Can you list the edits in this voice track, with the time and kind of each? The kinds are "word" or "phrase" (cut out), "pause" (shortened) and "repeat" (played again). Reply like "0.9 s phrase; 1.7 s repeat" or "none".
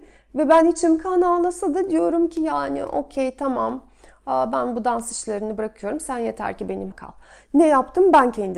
6.9 s word